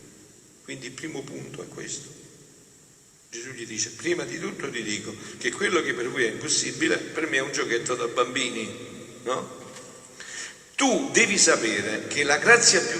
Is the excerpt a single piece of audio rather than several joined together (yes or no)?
yes